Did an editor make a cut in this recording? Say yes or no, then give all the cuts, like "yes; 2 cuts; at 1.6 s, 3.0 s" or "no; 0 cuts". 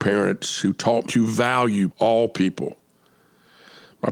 yes; 2 cuts; at 1.0 s, 1.9 s